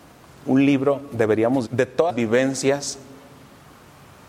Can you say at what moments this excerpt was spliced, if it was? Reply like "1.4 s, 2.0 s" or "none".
1.7 s, 2.1 s